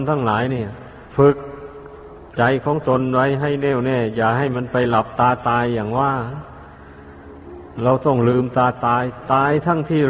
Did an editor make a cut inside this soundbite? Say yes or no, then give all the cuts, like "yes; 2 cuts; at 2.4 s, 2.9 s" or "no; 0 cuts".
yes; 1 cut; at 1.1 s